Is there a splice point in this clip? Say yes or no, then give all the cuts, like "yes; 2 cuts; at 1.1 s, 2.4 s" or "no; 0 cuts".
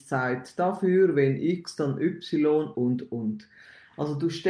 yes; 1 cut; at 2.7 s